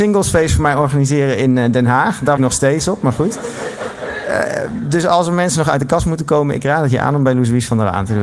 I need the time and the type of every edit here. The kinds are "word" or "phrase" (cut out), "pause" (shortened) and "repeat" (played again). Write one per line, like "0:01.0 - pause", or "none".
0:02.4 - phrase